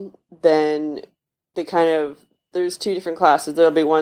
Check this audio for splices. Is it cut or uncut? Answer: uncut